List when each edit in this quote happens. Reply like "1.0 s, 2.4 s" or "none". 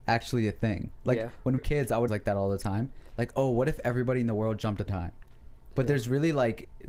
1.6 s, 2.1 s, 4.9 s